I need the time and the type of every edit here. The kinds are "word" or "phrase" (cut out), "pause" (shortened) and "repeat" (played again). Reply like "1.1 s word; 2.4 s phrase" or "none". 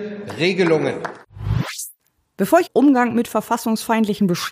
2.7 s phrase